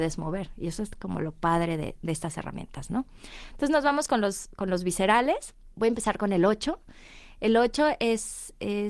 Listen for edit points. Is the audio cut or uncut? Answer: uncut